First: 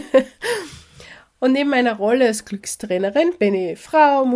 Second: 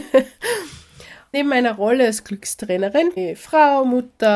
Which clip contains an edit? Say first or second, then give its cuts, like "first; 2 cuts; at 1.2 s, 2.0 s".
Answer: second; 2 cuts; at 1.3 s, 3.2 s